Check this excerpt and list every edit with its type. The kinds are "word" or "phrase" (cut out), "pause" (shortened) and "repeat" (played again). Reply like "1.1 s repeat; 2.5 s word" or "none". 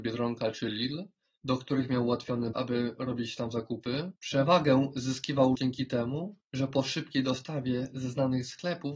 2.5 s word; 4.2 s pause; 5.5 s word; 6.4 s pause

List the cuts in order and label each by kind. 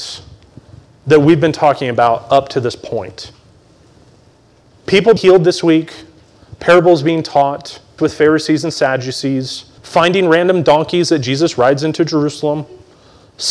5.2 s word; 8.0 s word; 9.8 s pause

